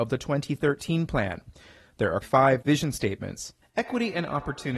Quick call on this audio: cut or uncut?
cut